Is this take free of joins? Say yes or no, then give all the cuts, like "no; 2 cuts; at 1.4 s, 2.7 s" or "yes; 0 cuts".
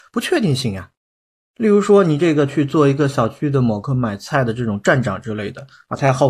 yes; 0 cuts